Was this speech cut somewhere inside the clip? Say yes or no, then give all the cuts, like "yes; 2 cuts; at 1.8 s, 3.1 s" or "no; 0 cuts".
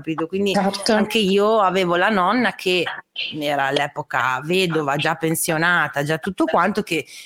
no; 0 cuts